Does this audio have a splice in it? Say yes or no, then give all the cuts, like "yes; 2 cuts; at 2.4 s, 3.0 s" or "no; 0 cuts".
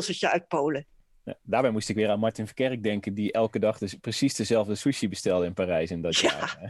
no; 0 cuts